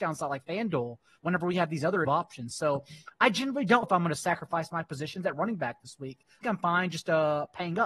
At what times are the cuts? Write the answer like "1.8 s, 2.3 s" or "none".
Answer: 2.0 s, 3.8 s, 6.4 s